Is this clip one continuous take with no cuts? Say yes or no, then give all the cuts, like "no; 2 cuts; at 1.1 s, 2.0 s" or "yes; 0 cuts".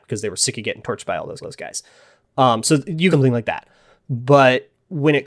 no; 2 cuts; at 1.4 s, 3.1 s